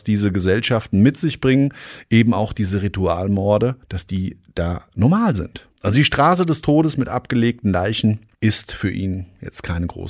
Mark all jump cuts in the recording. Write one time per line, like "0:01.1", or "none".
0:03.8
0:05.7
0:08.3